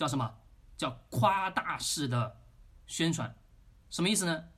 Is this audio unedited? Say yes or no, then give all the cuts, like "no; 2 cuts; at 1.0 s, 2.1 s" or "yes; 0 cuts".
yes; 0 cuts